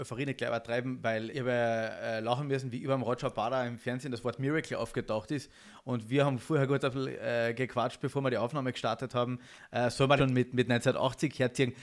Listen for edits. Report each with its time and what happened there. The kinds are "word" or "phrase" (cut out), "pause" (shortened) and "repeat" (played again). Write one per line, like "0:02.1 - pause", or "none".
0:01.3 - word
0:10.2 - phrase